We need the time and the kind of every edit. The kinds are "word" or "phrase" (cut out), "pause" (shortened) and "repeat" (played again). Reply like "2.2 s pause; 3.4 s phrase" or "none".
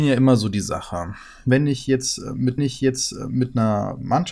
2.6 s repeat